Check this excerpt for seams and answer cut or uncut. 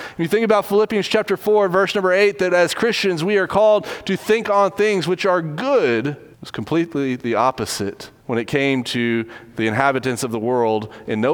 cut